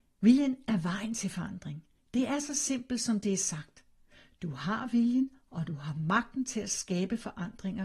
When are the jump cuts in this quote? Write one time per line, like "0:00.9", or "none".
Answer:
none